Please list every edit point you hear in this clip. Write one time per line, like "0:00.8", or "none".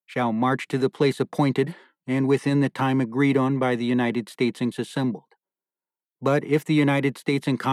0:04.7